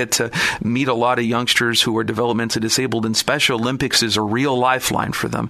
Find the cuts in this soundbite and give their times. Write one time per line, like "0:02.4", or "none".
none